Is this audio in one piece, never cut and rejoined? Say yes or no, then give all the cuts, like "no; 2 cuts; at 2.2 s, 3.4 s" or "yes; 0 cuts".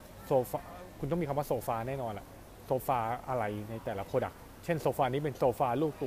yes; 0 cuts